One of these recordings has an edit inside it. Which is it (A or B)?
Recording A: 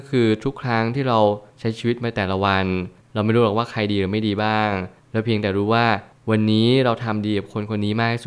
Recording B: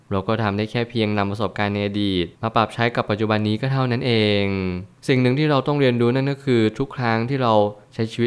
B